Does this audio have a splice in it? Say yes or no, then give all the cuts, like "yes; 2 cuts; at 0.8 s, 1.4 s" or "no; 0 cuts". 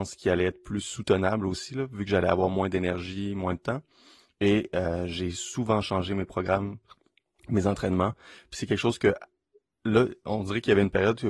no; 0 cuts